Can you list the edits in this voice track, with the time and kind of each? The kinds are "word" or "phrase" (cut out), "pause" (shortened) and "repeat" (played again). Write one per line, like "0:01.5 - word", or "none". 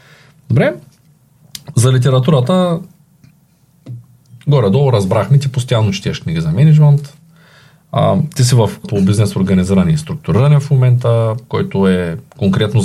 0:08.8 - word